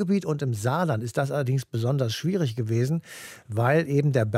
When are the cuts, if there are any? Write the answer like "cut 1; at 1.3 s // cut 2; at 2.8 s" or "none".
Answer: none